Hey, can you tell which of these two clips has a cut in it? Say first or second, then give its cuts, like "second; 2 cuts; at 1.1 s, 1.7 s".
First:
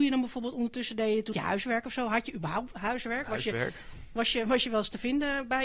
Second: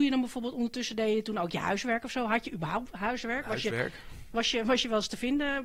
first; 1 cut; at 1.3 s